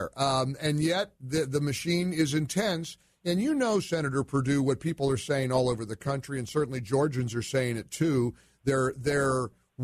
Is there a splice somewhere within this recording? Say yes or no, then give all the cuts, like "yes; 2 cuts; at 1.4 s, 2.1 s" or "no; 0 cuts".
no; 0 cuts